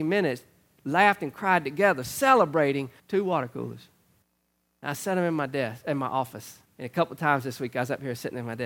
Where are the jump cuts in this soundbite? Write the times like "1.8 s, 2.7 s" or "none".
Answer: 3.0 s, 4.2 s, 6.6 s